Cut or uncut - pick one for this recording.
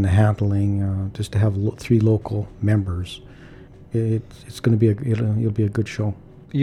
uncut